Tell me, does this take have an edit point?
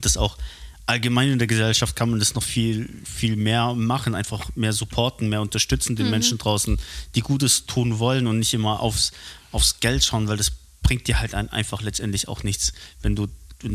no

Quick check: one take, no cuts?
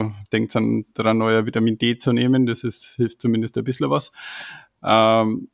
yes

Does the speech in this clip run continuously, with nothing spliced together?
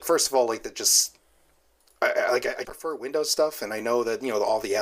no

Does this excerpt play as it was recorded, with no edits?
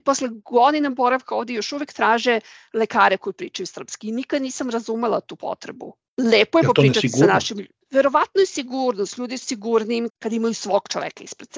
no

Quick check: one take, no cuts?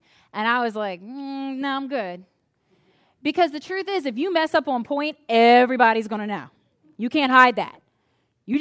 yes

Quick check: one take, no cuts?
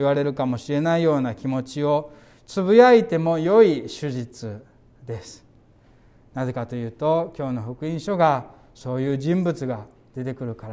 yes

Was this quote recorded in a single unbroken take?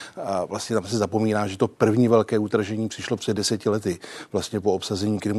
yes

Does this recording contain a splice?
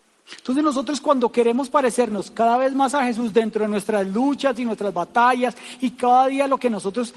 no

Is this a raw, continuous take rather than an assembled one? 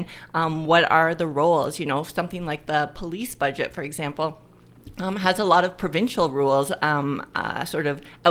yes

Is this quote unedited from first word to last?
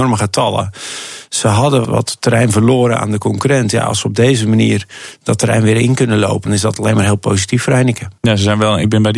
no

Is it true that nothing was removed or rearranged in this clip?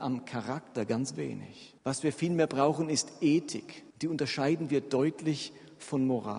no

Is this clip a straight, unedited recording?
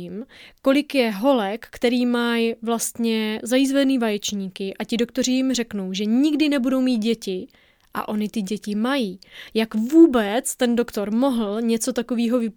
yes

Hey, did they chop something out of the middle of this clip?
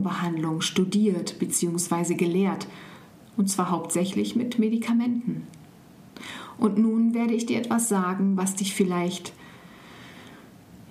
no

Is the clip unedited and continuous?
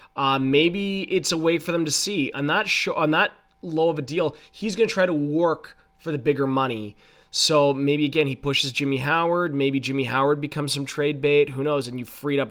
no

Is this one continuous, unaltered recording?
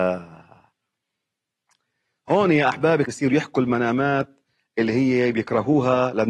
no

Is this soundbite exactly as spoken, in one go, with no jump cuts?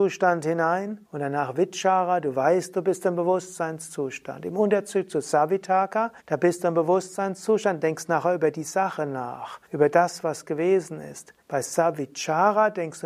no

